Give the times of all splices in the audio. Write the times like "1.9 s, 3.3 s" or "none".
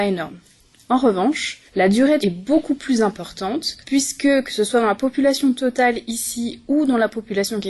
1.7 s, 2.2 s, 3.8 s